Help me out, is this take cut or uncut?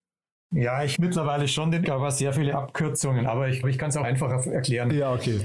cut